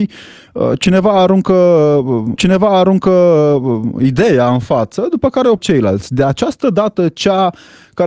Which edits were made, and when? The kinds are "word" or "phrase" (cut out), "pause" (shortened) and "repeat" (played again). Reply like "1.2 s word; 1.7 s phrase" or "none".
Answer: 2.4 s repeat; 5.6 s word